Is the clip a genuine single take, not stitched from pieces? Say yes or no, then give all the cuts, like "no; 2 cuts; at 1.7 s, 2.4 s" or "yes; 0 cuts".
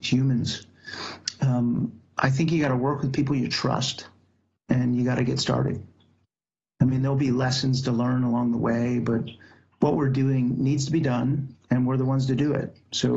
yes; 0 cuts